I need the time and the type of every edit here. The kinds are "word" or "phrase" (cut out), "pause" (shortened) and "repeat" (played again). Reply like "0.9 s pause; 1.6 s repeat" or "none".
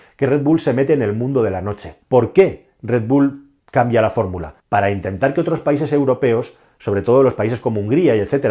2.0 s pause; 3.6 s pause; 4.6 s pause